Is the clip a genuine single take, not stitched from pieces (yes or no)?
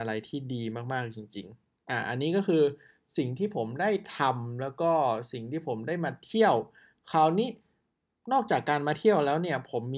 yes